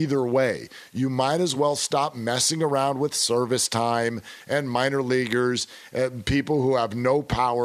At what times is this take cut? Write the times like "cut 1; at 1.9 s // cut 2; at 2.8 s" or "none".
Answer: none